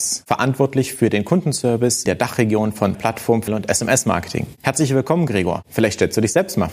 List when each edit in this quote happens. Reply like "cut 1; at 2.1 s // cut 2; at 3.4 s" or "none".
cut 1; at 2.1 s // cut 2; at 2.9 s // cut 3; at 3.5 s